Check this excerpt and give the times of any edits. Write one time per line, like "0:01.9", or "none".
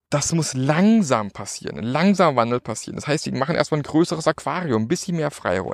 none

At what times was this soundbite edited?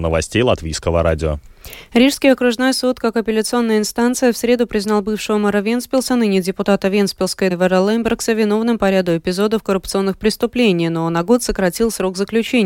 0:07.5

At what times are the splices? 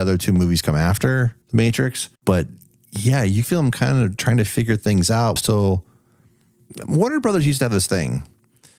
0:01.4
0:02.2
0:03.4
0:05.4

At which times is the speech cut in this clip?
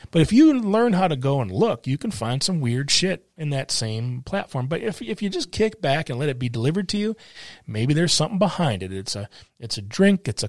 none

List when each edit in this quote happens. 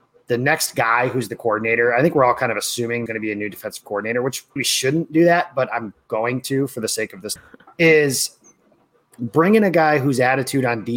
0:03.1
0:04.6
0:07.4

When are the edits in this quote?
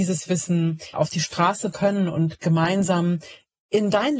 0:00.9
0:01.7

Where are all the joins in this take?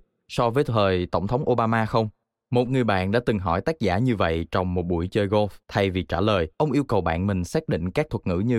0:02.2
0:05.6
0:06.5

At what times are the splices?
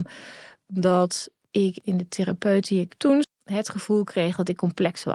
0:03.2

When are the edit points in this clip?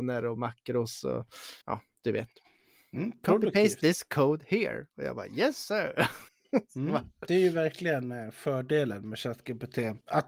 0:01.6
0:06.3

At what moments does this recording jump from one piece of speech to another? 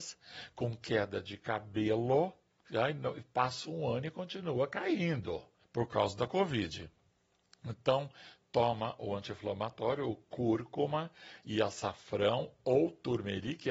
0:02.6
0:05.6

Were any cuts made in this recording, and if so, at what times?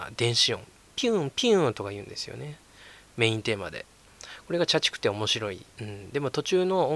0:05.7

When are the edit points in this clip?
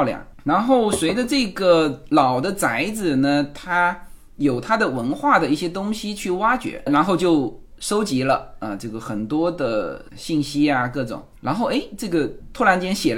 0:06.9
0:10.1

